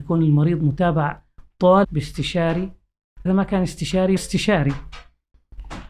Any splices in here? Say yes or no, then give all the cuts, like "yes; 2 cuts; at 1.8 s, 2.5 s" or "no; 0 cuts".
yes; 3 cuts; at 1.8 s, 3.3 s, 4.2 s